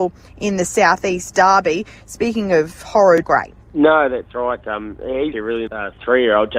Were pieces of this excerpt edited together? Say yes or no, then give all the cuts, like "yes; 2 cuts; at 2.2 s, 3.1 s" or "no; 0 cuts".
yes; 4 cuts; at 3.2 s, 3.6 s, 5.3 s, 5.7 s